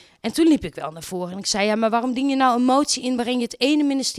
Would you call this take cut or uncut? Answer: uncut